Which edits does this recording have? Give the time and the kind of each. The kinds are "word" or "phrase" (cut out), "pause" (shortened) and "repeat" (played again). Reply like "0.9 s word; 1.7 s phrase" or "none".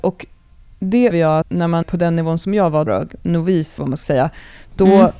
1.1 s word; 1.4 s word; 1.8 s word; 2.9 s word; 3.8 s word

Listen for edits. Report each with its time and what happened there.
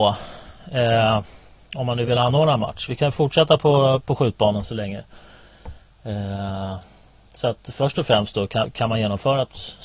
none

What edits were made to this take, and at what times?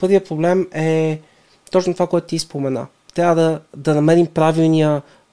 none

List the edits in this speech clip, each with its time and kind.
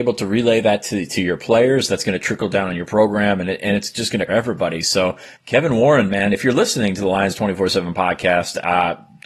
4.3 s phrase; 5.4 s pause

